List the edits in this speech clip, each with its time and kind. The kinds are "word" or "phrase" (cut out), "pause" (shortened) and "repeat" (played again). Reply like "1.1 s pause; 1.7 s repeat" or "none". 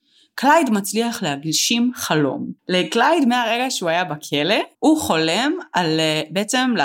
2.6 s pause; 4.7 s pause